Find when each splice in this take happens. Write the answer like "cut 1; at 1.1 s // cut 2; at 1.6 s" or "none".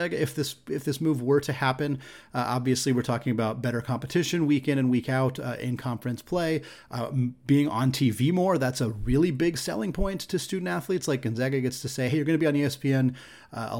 none